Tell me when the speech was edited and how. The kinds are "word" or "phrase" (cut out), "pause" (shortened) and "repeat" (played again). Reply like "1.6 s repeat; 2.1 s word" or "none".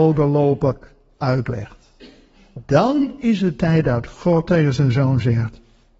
none